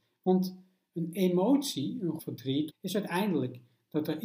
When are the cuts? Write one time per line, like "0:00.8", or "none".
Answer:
0:02.2
0:02.7